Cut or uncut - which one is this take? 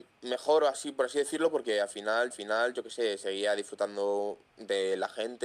cut